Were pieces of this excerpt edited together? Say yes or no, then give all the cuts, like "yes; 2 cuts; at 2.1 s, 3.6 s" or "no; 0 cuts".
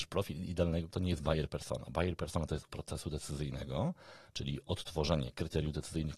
yes; 2 cuts; at 0.9 s, 2.7 s